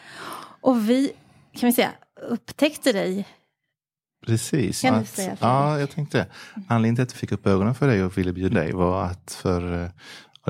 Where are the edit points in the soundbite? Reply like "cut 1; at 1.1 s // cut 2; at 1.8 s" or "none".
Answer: cut 1; at 4.8 s // cut 2; at 7.1 s // cut 3; at 8.5 s